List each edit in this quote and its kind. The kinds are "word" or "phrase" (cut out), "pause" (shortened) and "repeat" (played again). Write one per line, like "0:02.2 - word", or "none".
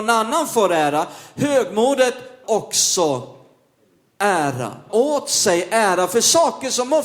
0:02.4 - word
0:04.9 - word

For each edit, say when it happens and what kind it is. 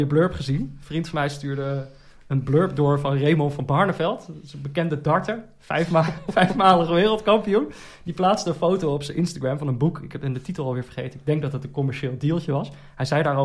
none

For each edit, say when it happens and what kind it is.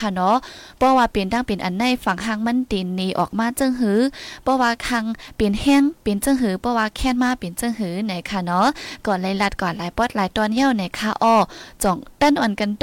0:06.0 - pause

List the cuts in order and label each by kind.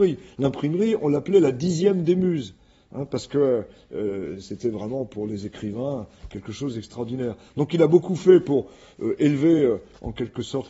none

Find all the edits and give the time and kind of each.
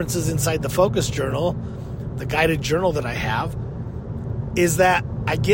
none

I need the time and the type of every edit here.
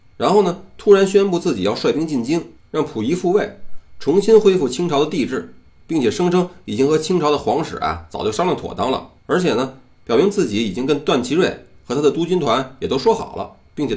0:05.7 - pause
0:09.2 - pause

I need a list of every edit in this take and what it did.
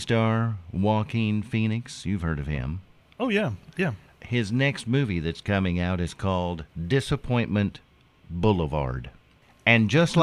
0:03.0 - pause
0:06.7 - pause

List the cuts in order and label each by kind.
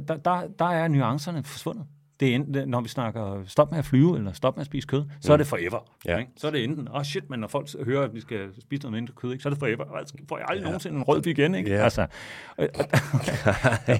0:11.2 - word

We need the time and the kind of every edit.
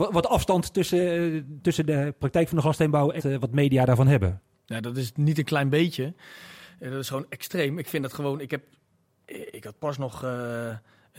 0:03.2 - phrase
0:04.5 - pause

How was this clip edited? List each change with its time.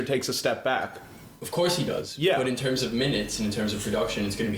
0:01.4 - pause

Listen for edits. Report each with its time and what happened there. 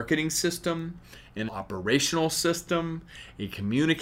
0:01.5 - word

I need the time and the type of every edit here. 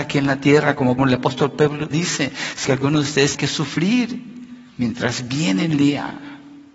0:01.0 - word
0:01.9 - word
0:02.6 - phrase
0:03.3 - word
0:04.7 - pause

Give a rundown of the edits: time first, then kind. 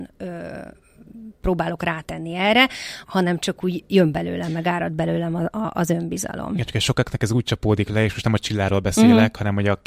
0:03.0 - word

